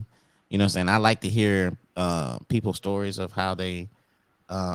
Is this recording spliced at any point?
yes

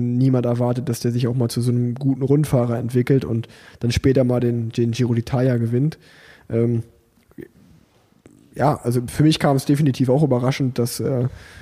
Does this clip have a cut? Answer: no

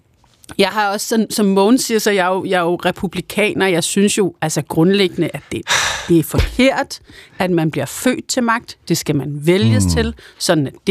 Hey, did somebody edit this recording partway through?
no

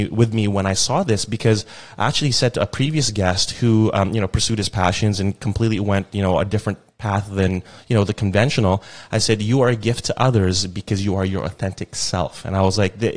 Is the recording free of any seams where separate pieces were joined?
yes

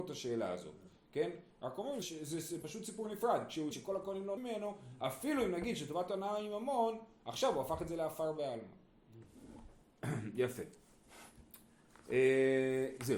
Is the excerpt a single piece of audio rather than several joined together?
no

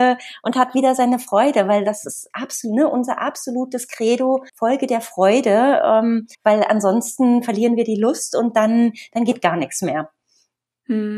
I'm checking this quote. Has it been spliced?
yes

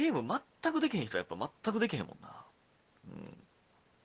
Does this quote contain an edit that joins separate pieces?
no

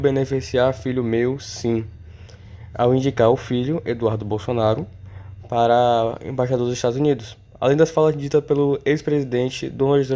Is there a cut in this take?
no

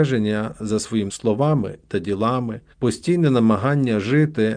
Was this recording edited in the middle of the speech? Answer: yes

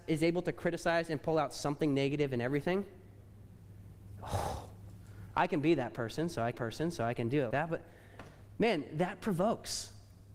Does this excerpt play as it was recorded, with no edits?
no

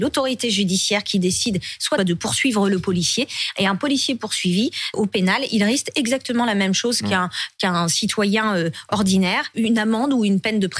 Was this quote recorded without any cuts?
no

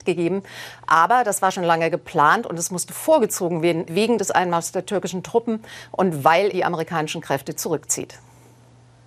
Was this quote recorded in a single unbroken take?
no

